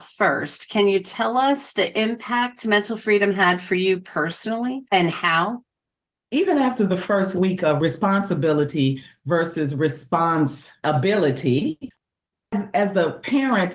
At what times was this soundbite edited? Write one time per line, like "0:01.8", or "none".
none